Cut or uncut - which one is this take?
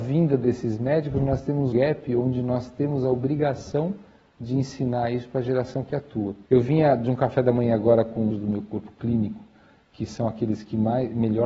cut